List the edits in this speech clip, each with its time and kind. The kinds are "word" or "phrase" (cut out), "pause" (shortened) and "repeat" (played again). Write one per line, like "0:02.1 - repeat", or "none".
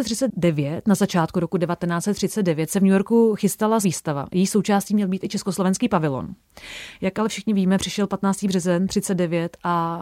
0:03.8 - word